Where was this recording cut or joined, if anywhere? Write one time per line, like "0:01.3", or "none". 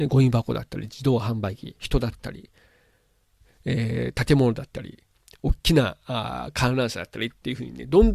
none